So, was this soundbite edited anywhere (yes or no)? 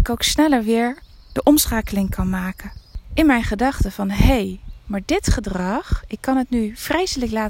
no